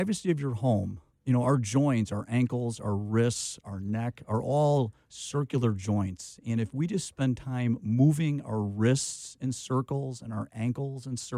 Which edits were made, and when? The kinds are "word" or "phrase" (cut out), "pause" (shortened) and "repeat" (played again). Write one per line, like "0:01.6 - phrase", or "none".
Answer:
0:01.1 - pause